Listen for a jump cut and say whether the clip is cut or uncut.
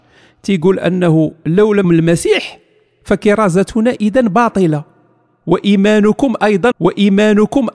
cut